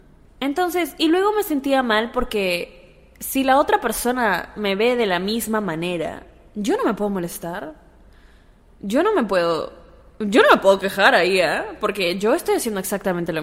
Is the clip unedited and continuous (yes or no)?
yes